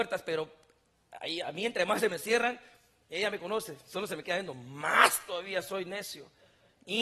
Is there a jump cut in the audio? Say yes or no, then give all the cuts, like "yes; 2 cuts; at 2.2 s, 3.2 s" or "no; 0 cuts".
no; 0 cuts